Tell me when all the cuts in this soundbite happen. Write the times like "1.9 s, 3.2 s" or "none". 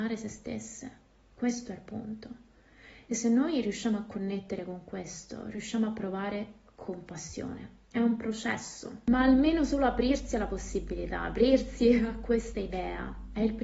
none